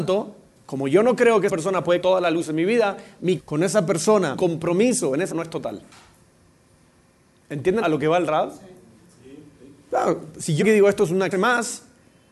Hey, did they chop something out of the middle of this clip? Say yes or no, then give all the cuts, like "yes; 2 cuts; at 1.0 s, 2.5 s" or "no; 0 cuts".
yes; 8 cuts; at 1.5 s, 2.0 s, 3.4 s, 4.4 s, 5.3 s, 7.8 s, 10.6 s, 11.3 s